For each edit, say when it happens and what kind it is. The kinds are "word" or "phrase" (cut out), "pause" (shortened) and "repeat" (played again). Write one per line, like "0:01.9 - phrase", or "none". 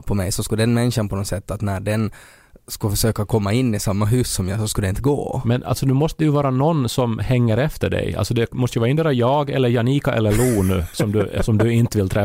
none